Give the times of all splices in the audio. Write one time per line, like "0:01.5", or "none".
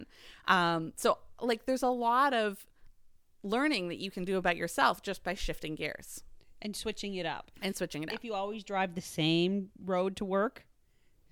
none